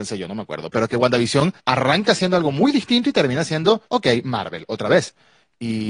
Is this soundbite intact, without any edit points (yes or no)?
no